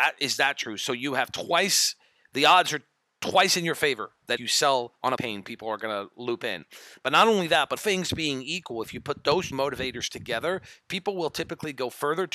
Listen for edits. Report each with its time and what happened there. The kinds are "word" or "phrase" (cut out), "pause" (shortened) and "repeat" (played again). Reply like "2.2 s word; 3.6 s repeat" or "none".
4.4 s word; 5.2 s word; 7.8 s word; 9.5 s word